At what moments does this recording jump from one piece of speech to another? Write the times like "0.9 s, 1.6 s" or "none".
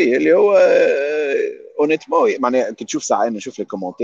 none